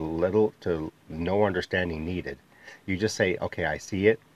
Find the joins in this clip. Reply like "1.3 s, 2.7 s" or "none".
none